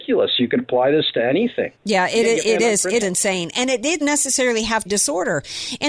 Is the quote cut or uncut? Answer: cut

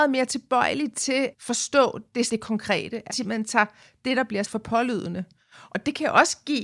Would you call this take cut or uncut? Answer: cut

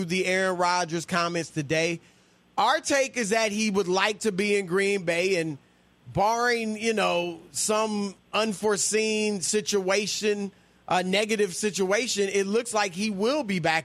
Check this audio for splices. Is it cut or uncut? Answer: uncut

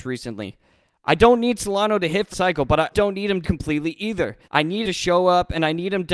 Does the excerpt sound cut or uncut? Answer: cut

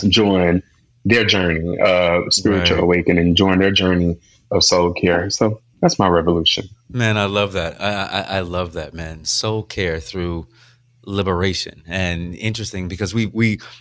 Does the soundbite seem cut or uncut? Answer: uncut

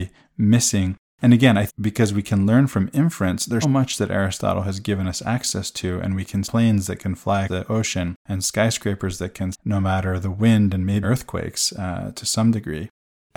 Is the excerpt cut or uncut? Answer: cut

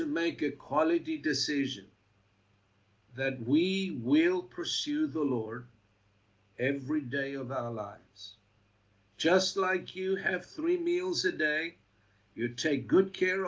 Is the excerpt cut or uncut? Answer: uncut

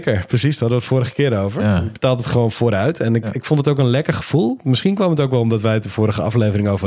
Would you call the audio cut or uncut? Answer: uncut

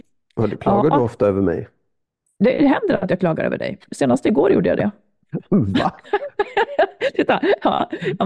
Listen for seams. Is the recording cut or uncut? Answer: uncut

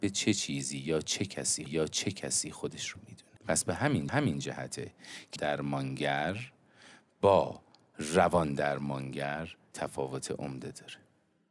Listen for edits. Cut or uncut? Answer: cut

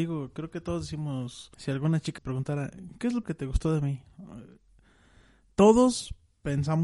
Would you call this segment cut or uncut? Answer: cut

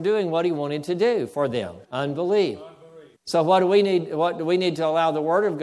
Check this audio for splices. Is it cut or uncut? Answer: cut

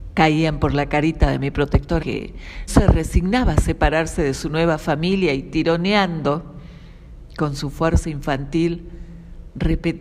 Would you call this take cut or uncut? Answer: cut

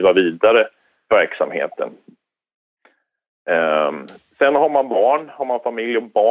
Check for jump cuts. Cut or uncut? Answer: uncut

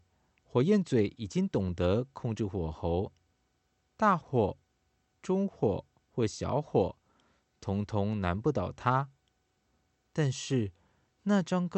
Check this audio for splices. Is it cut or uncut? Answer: uncut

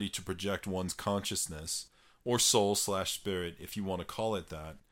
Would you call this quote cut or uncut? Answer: uncut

